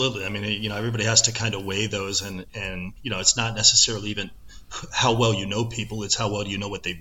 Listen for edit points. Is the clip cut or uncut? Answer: uncut